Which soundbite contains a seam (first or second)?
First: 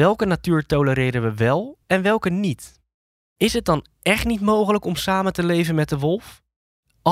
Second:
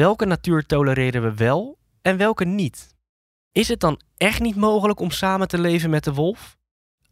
first